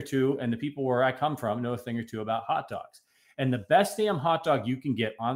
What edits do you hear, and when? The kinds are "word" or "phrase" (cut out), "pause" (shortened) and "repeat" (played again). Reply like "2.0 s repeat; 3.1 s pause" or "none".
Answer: none